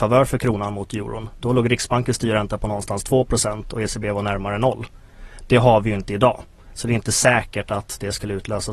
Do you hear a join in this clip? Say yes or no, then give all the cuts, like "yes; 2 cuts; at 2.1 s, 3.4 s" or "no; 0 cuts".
no; 0 cuts